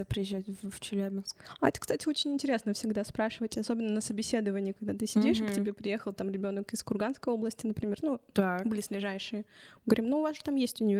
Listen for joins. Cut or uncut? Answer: uncut